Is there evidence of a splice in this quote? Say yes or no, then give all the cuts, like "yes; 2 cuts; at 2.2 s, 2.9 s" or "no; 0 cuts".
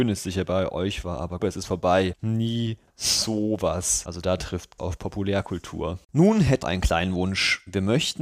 yes; 5 cuts; at 1.4 s, 2.9 s, 4.8 s, 6.0 s, 6.6 s